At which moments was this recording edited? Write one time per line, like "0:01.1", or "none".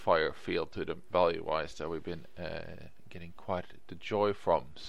none